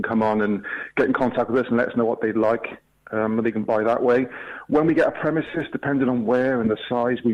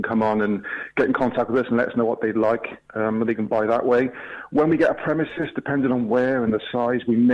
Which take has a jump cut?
second; 1 cut; at 2.9 s

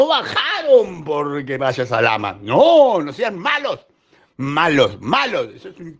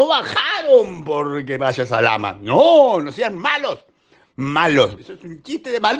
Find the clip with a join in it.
second; 1 cut; at 5.0 s

